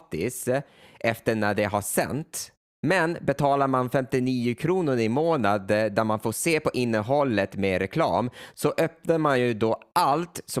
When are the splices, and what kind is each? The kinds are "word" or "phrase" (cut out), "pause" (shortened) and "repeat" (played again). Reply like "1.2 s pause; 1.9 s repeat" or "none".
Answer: none